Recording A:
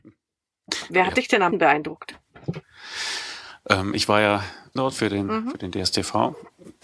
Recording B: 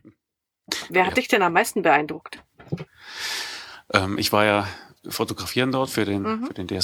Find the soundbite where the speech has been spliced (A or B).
A